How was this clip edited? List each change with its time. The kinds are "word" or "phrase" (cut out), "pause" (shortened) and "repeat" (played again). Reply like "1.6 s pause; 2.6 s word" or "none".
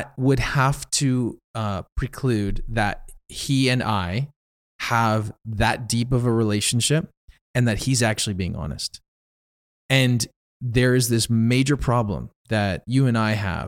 none